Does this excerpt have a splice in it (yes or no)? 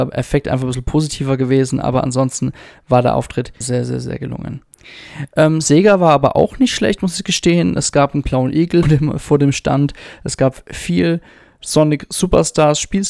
yes